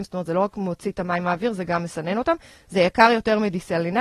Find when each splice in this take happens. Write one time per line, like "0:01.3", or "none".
none